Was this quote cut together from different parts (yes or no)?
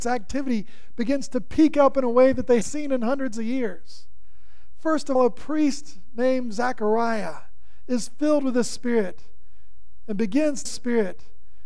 yes